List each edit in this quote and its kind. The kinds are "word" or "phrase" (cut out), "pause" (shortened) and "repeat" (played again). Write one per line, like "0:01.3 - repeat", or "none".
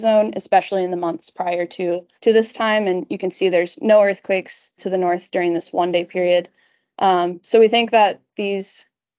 0:02.1 - pause
0:04.8 - word